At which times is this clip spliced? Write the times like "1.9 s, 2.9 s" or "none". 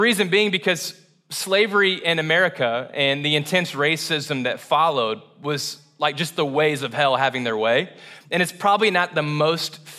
none